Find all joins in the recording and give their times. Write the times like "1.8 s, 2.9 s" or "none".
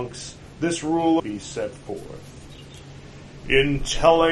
1.2 s